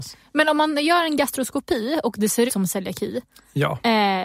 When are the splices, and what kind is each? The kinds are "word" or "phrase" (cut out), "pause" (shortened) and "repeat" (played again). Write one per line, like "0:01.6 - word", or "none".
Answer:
0:02.5 - word